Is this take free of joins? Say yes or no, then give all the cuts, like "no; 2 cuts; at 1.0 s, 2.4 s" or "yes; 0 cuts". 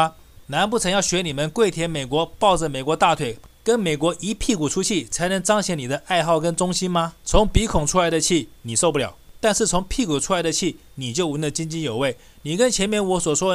no; 1 cut; at 7.2 s